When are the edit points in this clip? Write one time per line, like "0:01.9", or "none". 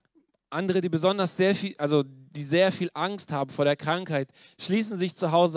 none